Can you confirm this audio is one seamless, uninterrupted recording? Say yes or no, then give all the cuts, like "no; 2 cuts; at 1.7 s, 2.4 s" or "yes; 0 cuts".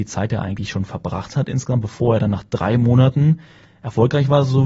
yes; 0 cuts